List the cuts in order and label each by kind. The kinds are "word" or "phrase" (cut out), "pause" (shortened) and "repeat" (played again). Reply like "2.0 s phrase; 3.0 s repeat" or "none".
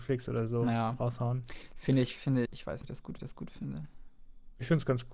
2.5 s word; 2.8 s phrase; 3.2 s repeat